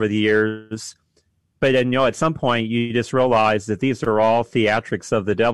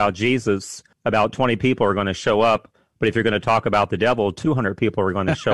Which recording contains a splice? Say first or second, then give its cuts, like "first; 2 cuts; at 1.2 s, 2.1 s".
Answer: second; 1 cut; at 0.9 s